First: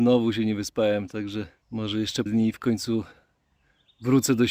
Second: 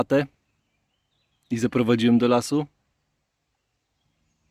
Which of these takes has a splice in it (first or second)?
first